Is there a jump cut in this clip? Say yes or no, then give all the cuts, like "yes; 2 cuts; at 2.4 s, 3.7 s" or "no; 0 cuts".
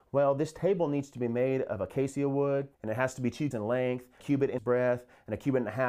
yes; 4 cuts; at 2.7 s, 3.5 s, 4.2 s, 4.6 s